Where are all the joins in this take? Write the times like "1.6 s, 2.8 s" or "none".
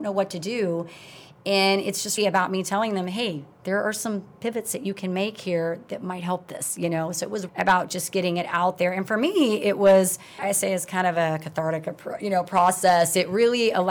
2.2 s, 7.5 s, 10.4 s